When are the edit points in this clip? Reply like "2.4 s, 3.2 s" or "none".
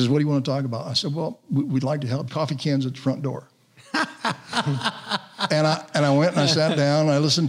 2.3 s